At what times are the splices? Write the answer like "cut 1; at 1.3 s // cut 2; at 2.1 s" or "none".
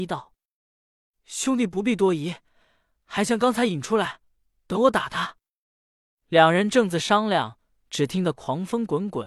none